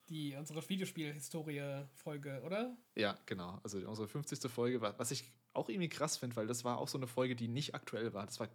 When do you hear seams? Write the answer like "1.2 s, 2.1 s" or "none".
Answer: 2.8 s

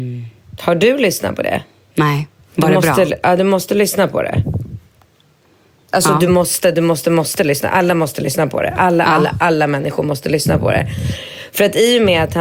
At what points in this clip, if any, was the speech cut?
none

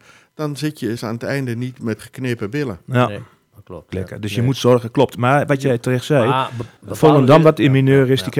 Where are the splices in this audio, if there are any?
1.0 s, 2.0 s, 3.9 s, 6.8 s

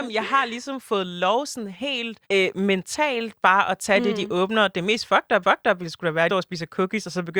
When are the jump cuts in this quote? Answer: 2.2 s, 5.4 s, 6.3 s

